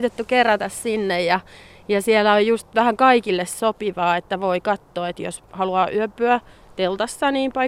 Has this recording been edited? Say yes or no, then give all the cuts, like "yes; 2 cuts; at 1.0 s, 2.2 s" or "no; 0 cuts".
no; 0 cuts